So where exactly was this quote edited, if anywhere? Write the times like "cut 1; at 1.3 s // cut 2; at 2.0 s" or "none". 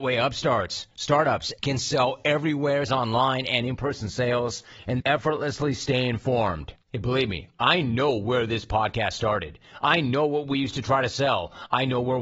cut 1; at 1.6 s // cut 2; at 2.9 s // cut 3; at 5.0 s // cut 4; at 6.8 s

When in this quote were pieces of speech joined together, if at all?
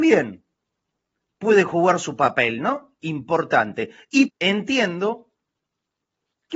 cut 1; at 4.3 s

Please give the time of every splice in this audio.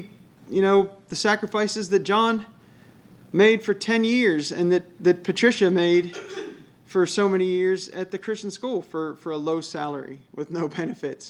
none

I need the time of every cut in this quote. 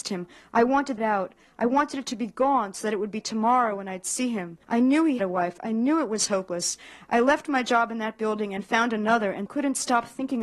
cut 1; at 1.0 s // cut 2; at 4.6 s // cut 3; at 5.2 s // cut 4; at 9.5 s

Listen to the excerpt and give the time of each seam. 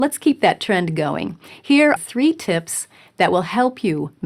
cut 1; at 2.0 s

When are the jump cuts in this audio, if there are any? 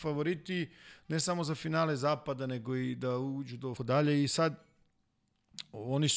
cut 1; at 3.8 s

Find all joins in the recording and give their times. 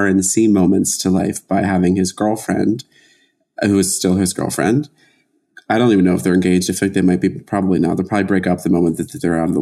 none

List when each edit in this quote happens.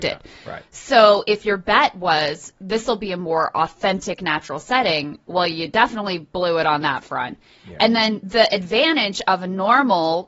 none

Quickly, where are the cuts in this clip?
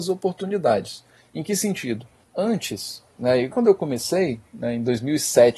cut 1; at 1.2 s // cut 2; at 2.2 s // cut 3; at 3.5 s

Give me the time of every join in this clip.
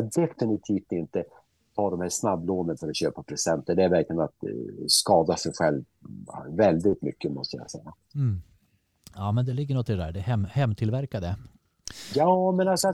none

